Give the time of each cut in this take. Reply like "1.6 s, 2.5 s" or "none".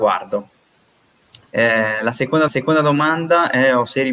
1.5 s, 2.5 s